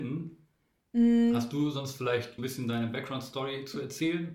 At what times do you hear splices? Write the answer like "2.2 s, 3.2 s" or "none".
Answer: 2.4 s